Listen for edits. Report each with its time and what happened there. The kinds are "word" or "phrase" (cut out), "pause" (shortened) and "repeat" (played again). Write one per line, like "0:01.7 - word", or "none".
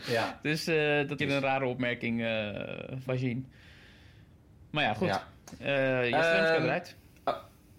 0:01.2 - phrase
0:03.1 - word